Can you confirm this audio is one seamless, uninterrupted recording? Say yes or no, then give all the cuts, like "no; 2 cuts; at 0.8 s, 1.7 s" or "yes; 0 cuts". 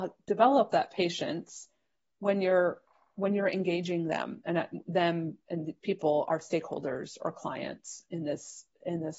yes; 0 cuts